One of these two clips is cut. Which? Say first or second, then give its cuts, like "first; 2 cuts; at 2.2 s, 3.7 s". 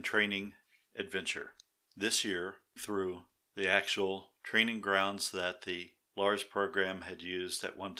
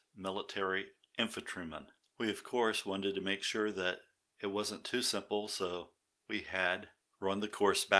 first; 1 cut; at 2.8 s